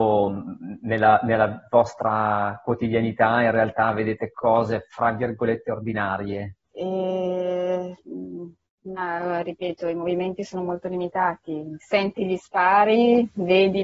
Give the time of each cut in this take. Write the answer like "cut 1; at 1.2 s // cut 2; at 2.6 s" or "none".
cut 1; at 6.6 s